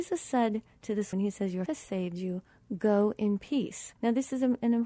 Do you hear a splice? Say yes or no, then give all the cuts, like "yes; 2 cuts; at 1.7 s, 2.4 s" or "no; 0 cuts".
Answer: yes; 3 cuts; at 1.1 s, 1.7 s, 4.0 s